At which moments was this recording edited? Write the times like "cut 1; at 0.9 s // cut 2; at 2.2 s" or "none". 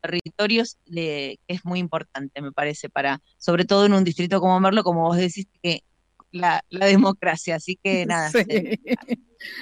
cut 1; at 3.3 s // cut 2; at 6.2 s